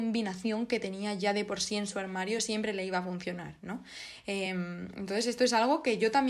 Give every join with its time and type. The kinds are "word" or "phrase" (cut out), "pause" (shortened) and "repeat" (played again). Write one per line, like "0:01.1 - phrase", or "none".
none